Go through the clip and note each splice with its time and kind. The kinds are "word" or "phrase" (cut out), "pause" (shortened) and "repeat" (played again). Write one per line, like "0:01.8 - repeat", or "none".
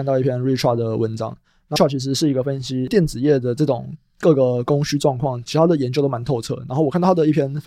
0:01.8 - phrase